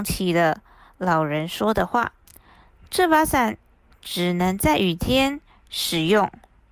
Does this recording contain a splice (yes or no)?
yes